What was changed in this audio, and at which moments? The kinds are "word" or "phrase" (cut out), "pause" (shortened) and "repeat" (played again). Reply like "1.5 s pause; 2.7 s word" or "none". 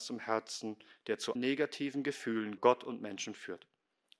0.9 s pause; 1.4 s word; 2.6 s word